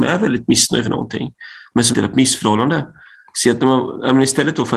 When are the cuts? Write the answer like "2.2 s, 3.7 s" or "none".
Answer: 1.9 s